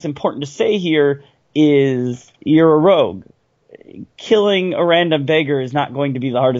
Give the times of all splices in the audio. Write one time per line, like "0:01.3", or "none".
0:02.3

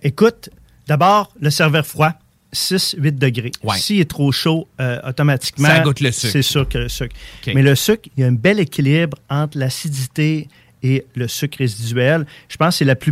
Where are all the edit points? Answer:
none

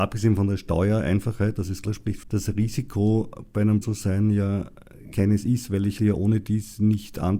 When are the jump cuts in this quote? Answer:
0:01.9
0:02.2
0:03.8
0:05.1
0:06.0

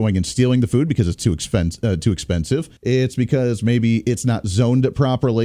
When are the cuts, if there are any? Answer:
0:02.8

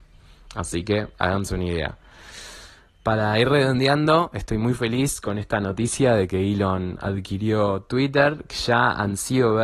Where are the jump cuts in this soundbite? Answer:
none

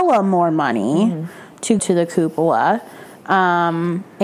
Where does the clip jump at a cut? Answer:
0:01.8

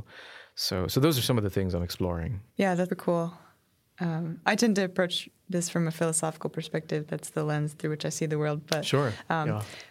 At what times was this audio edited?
0:02.5
0:02.9

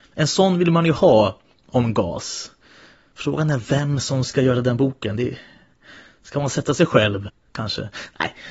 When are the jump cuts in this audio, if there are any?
none

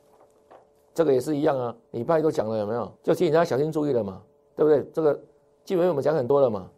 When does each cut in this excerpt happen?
0:01.9
0:03.0

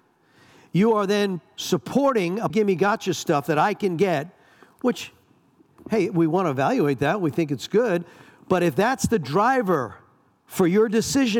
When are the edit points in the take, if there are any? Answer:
0:02.5

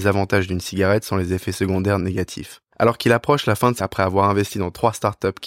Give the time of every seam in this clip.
0:03.8

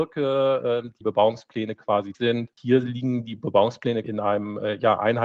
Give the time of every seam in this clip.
0:01.0
0:02.1
0:02.5
0:04.0

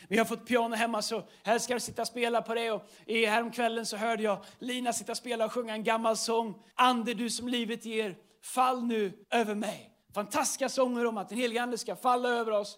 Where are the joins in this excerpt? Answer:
0:06.7
0:09.2
0:10.0

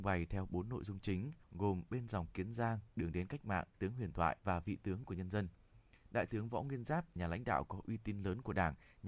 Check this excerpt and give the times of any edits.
0:01.4
0:02.9
0:03.7
0:04.4
0:07.2

